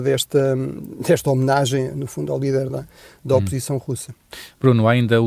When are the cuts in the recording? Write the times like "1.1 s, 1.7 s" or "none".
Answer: none